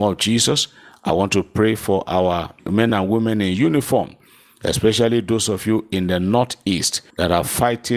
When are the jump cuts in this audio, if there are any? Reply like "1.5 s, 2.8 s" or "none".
none